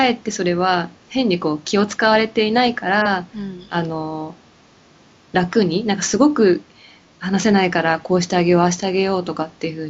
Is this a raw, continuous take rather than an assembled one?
yes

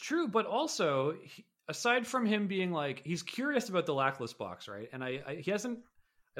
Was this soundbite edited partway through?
no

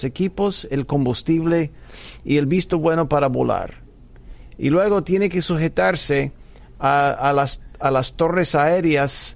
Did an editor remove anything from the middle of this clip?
no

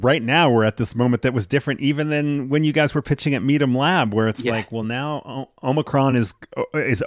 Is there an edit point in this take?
no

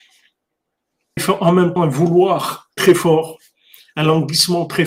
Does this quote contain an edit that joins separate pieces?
yes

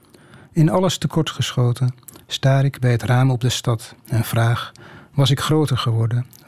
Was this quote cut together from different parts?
yes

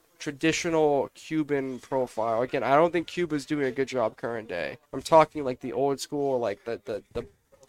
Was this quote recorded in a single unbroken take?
no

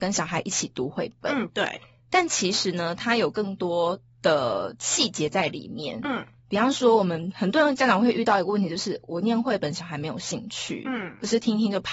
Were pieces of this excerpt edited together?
no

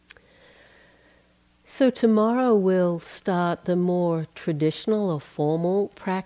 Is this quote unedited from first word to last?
yes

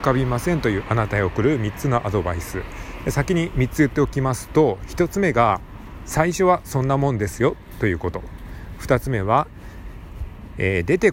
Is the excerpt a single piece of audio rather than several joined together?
yes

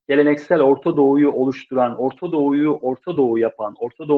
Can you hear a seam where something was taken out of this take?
no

